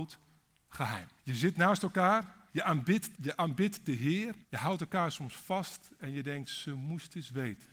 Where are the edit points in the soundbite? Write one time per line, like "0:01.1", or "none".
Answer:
0:01.2
0:02.5
0:03.1
0:04.4